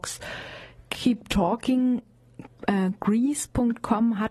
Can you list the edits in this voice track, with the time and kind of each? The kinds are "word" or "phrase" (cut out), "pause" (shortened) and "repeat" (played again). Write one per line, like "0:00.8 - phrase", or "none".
none